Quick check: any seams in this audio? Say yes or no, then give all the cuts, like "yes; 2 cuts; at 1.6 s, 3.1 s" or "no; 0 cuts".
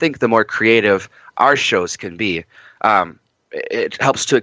no; 0 cuts